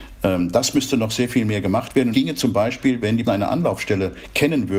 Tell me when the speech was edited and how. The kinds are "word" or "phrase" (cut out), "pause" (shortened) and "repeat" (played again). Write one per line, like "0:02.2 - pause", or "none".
0:02.1 - word
0:03.2 - word